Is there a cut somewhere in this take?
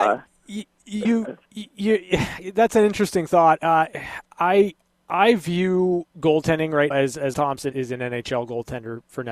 yes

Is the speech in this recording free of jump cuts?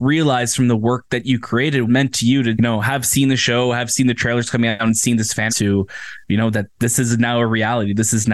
no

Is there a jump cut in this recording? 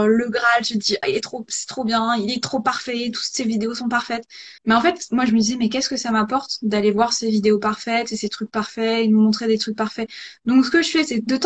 yes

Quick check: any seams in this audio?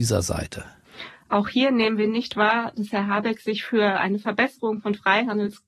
no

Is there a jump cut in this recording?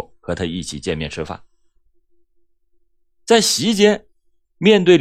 no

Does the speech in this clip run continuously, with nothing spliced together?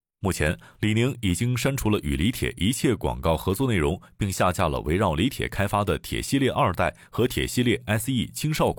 yes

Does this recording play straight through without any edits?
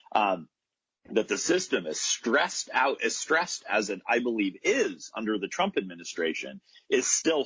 yes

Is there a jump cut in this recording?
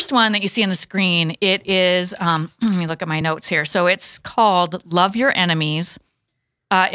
no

